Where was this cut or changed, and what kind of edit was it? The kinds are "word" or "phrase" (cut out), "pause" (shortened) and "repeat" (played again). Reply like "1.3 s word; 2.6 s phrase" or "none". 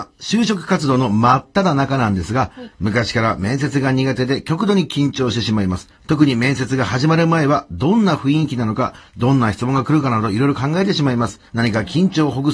5.9 s pause; 11.5 s pause